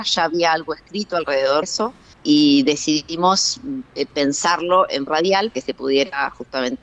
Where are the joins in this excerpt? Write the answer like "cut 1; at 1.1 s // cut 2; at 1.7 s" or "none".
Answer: cut 1; at 1.6 s // cut 2; at 2.1 s // cut 3; at 5.1 s // cut 4; at 5.5 s